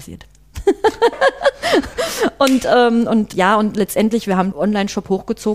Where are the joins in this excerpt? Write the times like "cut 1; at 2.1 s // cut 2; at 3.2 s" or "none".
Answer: cut 1; at 3.3 s // cut 2; at 4.5 s